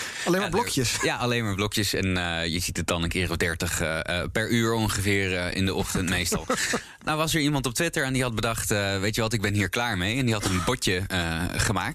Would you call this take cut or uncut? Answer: uncut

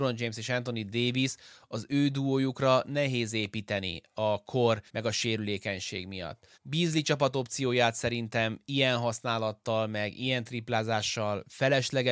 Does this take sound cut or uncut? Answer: cut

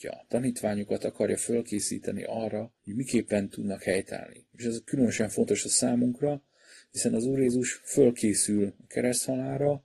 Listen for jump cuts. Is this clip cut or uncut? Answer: cut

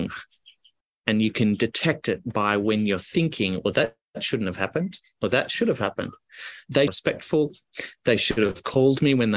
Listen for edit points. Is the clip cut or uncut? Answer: cut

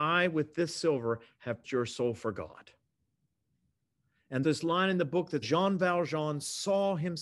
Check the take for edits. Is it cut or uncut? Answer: cut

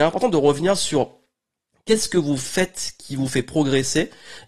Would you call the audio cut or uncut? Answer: uncut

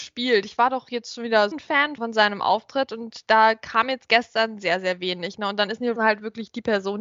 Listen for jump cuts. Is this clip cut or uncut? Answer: cut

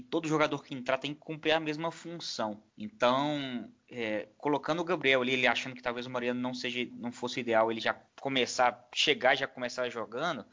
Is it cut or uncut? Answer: cut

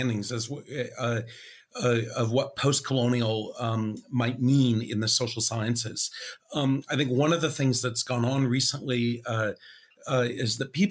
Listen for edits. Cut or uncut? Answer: uncut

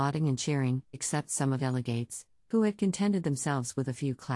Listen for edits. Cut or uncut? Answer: cut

